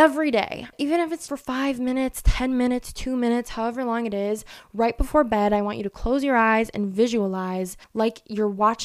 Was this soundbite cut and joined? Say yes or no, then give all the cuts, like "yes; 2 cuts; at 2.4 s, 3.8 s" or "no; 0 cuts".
yes; 2 cuts; at 1.3 s, 7.8 s